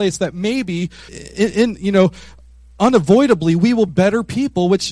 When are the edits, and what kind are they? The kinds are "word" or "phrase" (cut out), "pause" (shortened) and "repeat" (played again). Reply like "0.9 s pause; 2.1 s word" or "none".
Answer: 1.1 s word; 3.9 s word